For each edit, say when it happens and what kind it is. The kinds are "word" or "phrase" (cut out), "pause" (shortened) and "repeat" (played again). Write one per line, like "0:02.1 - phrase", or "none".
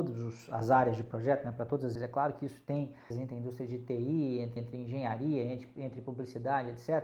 0:01.9 - word
0:03.1 - word
0:04.6 - repeat